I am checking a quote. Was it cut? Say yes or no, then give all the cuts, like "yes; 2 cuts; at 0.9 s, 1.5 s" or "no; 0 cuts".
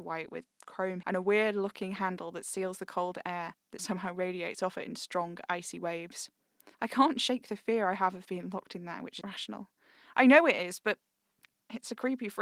yes; 4 cuts; at 1.0 s, 3.8 s, 6.7 s, 9.2 s